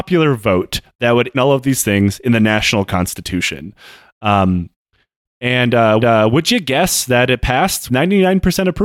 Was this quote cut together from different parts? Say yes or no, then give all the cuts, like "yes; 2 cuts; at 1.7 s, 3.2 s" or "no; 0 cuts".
yes; 3 cuts; at 1.3 s, 6.0 s, 7.9 s